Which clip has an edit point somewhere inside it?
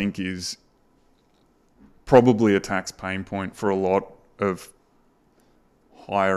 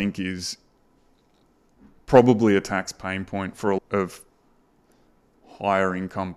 second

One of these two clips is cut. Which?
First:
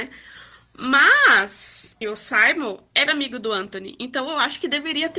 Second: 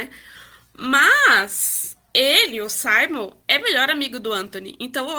first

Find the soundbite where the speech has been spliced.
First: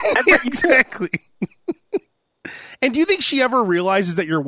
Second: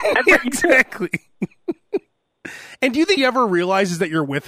second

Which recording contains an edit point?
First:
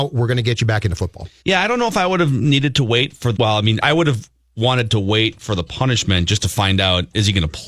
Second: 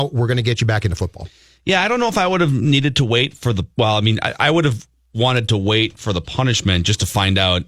first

